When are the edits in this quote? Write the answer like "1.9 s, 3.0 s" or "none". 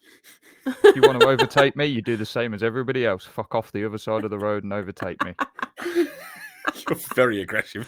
none